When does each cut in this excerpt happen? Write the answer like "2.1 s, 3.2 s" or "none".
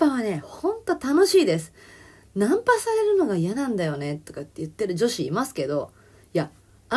none